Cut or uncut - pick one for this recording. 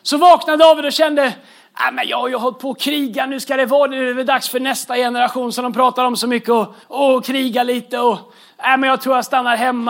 cut